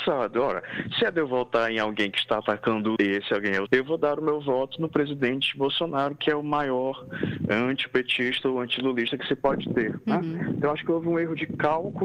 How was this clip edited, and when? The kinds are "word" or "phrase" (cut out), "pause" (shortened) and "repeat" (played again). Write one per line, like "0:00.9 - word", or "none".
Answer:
0:03.0 - word
0:03.7 - word